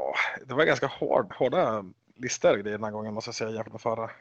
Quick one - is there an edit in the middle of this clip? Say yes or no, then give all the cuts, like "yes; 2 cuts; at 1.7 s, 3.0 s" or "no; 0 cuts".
yes; 1 cut; at 1.3 s